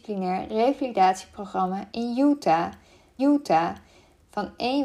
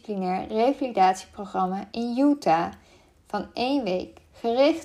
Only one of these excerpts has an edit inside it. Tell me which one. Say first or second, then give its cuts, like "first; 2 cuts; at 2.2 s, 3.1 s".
first; 1 cut; at 3.2 s